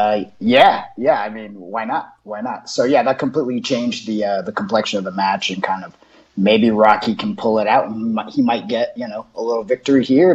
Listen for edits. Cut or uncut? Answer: uncut